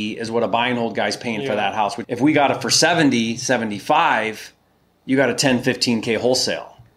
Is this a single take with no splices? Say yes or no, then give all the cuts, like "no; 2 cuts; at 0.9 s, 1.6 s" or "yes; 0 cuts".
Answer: no; 1 cut; at 2.0 s